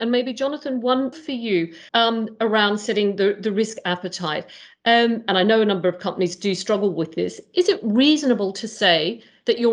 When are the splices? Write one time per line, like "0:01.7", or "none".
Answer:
0:01.1
0:01.9